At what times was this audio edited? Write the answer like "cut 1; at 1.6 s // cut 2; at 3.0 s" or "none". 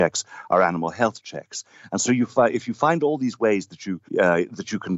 cut 1; at 4.1 s

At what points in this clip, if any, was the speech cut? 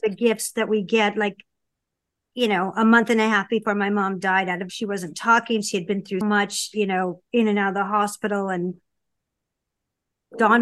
cut 1; at 4.7 s // cut 2; at 6.2 s

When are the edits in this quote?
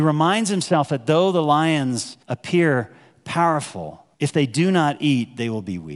cut 1; at 2.2 s // cut 2; at 4.1 s

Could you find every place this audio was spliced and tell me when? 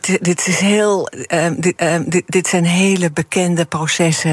cut 1; at 1.8 s

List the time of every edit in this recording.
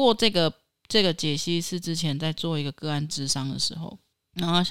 none

